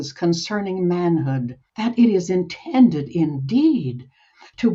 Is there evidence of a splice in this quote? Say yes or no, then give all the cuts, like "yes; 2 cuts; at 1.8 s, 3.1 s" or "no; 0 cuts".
yes; 1 cut; at 1.7 s